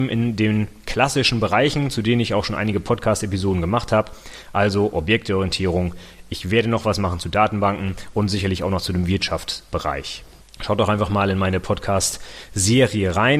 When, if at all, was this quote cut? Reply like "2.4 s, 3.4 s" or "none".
10.4 s